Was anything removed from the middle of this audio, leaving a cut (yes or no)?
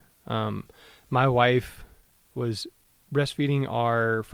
no